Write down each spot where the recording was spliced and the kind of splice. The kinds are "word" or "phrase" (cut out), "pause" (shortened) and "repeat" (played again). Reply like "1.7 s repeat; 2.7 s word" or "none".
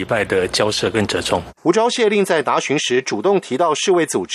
1.6 s pause